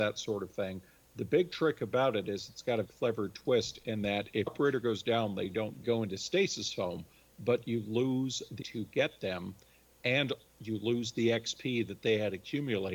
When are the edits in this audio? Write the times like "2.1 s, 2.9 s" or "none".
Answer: 2.8 s, 4.5 s, 5.8 s, 8.6 s